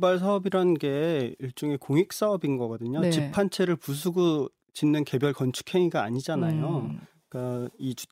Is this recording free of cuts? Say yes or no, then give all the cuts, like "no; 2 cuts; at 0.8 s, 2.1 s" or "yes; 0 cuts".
yes; 0 cuts